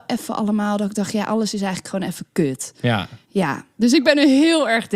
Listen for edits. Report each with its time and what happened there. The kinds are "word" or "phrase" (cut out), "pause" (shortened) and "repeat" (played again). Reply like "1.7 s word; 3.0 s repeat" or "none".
3.2 s pause

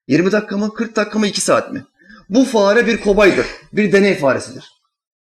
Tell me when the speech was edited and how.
none

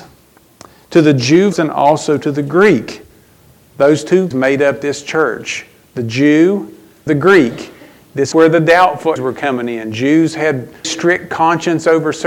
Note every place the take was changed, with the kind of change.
1.5 s word; 4.3 s word; 7.1 s word; 8.3 s word; 9.2 s word; 10.8 s word

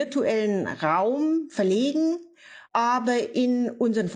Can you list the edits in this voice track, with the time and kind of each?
2.6 s pause

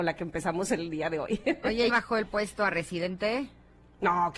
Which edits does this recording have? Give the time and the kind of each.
1.9 s phrase

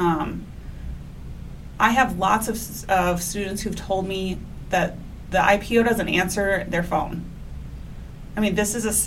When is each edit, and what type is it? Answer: none

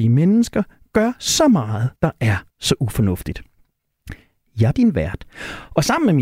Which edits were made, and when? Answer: 2.0 s pause; 2.5 s pause; 4.7 s word

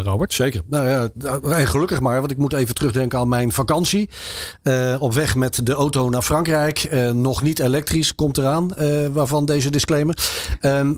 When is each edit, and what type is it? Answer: none

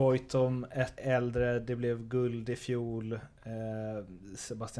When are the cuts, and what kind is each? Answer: 1.0 s word

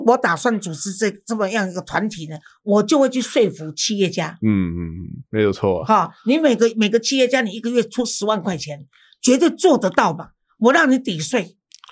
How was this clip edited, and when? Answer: none

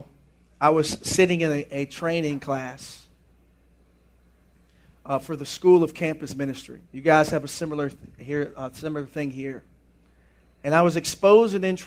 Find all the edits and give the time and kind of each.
6.8 s pause

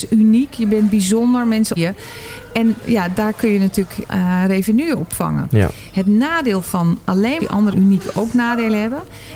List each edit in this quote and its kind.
1.8 s word; 2.8 s word; 4.1 s phrase; 7.4 s phrase; 7.7 s word

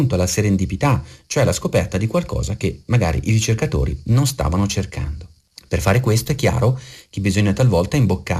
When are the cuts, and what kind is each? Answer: none

